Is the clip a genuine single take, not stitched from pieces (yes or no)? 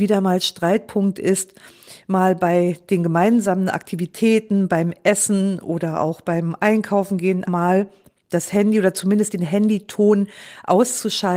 no